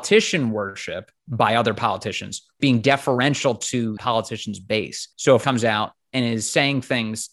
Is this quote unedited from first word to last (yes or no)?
no